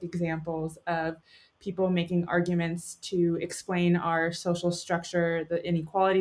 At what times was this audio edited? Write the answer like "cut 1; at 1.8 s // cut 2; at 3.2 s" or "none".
none